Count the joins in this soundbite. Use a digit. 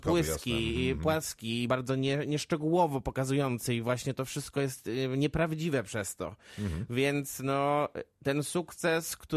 1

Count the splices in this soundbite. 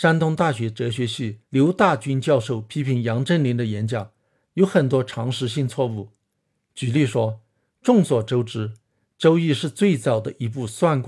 1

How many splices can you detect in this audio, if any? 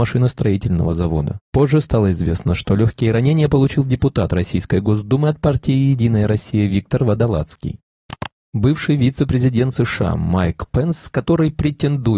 0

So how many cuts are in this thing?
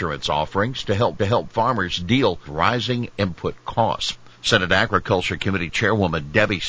3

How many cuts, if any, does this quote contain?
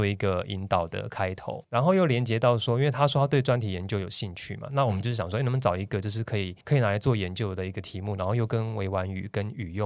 2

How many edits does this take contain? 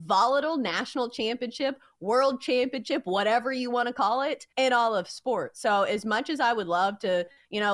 1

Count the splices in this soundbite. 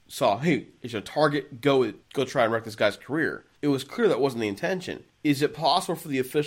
3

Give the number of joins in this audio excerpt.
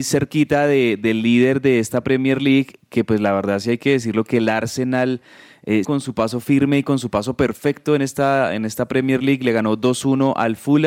1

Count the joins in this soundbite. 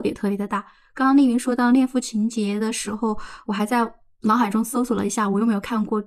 0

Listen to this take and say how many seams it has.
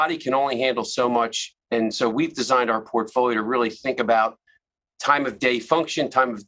0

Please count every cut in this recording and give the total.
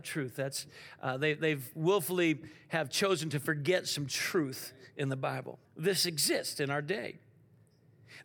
1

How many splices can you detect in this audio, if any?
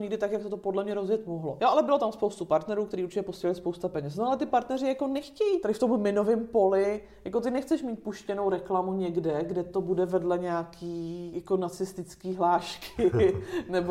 0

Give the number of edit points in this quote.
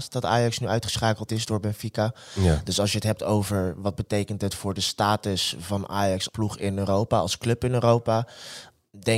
1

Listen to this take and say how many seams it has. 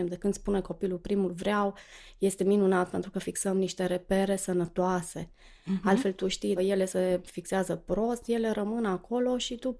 1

